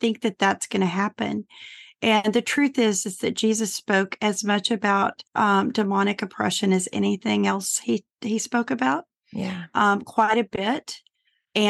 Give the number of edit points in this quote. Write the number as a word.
one